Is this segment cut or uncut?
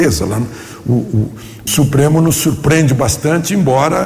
cut